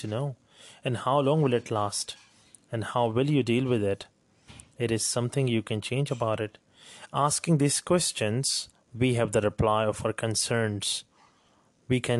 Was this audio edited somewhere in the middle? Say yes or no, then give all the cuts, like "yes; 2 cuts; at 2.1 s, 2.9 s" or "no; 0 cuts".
no; 0 cuts